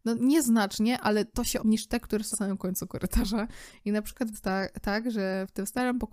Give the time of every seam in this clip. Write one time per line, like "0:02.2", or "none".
0:01.6
0:02.3
0:04.3